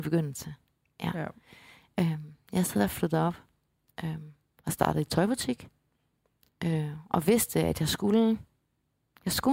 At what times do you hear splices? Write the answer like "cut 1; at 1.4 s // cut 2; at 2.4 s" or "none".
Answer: none